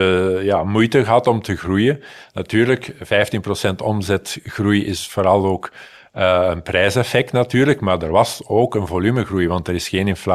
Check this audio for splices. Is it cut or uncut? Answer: uncut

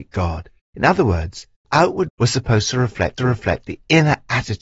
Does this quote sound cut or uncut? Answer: cut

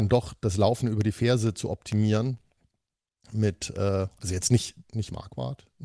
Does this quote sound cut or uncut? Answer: uncut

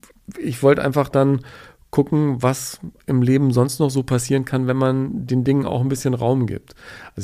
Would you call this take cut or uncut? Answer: uncut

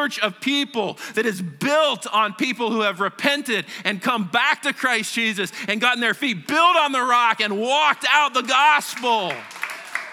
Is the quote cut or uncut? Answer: uncut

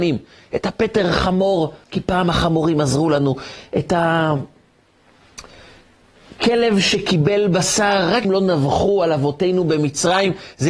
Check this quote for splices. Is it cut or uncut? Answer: cut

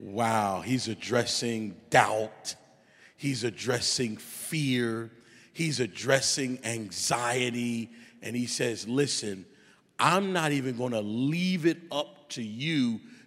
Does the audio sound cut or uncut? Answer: uncut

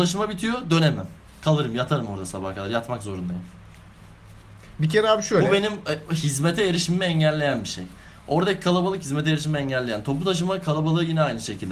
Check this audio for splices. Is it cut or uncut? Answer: uncut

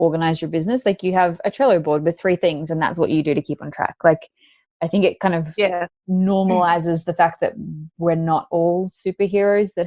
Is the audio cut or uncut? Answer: uncut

